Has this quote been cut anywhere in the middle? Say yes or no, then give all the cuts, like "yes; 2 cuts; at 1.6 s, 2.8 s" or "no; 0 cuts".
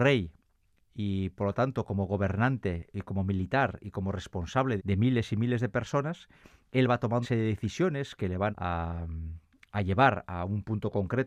yes; 3 cuts; at 4.8 s, 7.2 s, 8.5 s